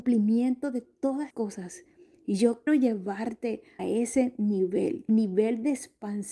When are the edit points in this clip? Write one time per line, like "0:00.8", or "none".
0:01.3
0:02.7
0:03.8
0:05.1